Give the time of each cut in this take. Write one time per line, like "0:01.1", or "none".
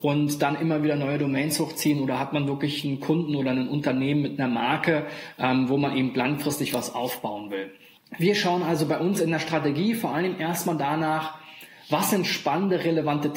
0:08.0